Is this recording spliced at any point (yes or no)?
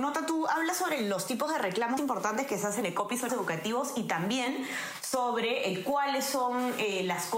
yes